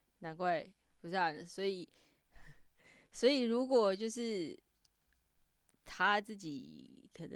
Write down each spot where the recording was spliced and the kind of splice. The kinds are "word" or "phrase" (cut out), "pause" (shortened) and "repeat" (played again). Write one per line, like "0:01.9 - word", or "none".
none